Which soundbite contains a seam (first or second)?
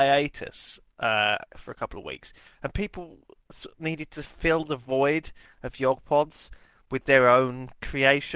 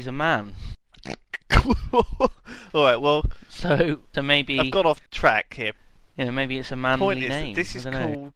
second